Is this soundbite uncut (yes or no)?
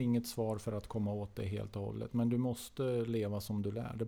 yes